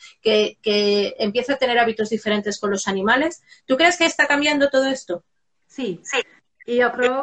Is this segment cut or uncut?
uncut